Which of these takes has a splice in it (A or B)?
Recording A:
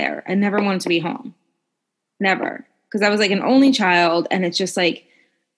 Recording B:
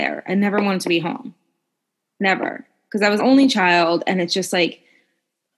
B